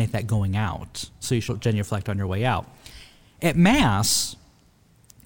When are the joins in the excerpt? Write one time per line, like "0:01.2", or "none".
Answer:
0:01.5